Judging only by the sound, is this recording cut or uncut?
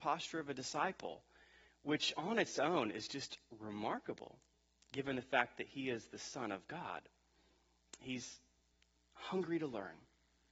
uncut